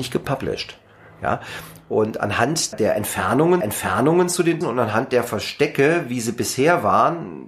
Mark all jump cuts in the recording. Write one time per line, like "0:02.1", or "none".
0:02.7
0:03.6
0:04.6